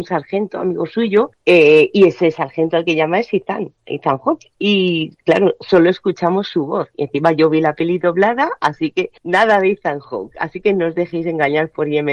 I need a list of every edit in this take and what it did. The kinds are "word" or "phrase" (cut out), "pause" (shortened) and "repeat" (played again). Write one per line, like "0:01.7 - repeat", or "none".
0:09.2 - pause